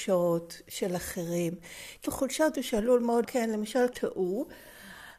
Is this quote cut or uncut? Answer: cut